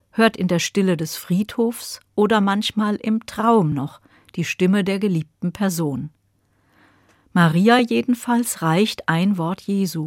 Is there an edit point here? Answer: no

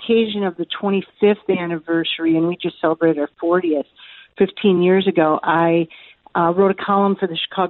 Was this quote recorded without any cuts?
yes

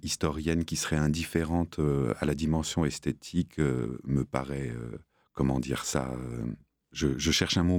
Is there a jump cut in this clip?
no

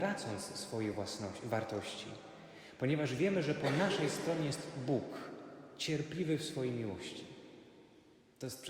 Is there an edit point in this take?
no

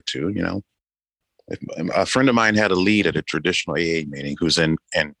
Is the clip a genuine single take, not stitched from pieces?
yes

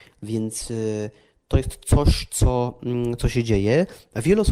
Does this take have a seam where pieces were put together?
no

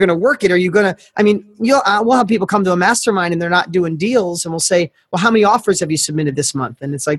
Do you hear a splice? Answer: no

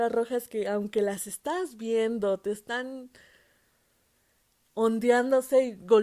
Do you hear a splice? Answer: no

